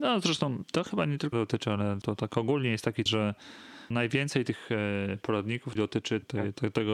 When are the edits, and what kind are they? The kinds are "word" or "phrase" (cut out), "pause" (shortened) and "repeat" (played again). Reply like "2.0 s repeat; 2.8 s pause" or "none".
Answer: 1.3 s word; 2.0 s word; 3.1 s word; 3.9 s word; 5.8 s word